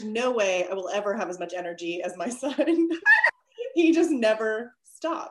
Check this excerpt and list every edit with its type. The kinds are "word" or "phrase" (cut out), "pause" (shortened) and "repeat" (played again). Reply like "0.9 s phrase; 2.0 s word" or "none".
none